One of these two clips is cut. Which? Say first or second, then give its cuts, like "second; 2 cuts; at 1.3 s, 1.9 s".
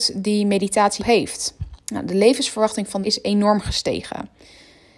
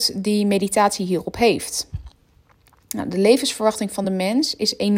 first; 3 cuts; at 1.0 s, 1.8 s, 3.0 s